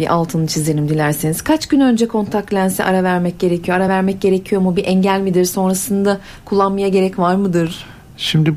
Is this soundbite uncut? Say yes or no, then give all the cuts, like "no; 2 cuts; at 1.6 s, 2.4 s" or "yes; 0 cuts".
yes; 0 cuts